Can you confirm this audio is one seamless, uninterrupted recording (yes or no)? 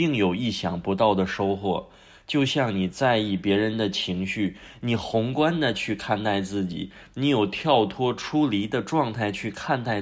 yes